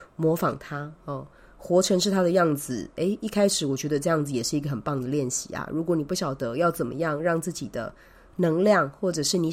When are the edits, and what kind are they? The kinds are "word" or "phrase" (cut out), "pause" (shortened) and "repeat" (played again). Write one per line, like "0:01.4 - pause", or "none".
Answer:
none